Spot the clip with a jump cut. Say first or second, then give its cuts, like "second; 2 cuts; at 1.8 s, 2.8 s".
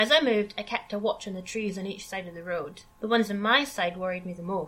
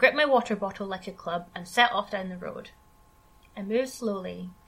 first; 1 cut; at 2.9 s